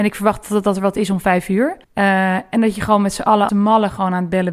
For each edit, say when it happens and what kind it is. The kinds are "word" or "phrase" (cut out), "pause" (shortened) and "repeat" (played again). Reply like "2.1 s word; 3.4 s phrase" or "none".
1.8 s pause; 3.5 s word